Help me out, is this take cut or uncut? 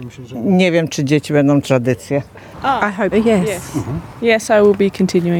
cut